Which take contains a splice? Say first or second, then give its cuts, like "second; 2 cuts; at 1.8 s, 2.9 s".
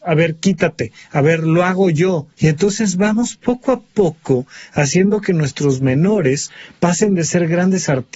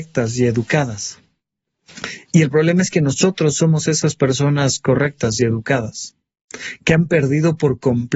first; 1 cut; at 2.3 s